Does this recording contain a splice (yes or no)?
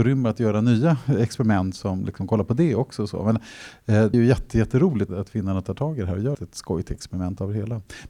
yes